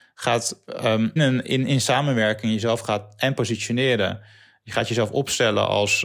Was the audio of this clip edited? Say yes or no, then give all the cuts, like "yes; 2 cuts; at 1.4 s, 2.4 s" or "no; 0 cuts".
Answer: yes; 1 cut; at 1.2 s